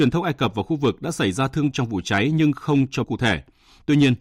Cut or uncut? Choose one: cut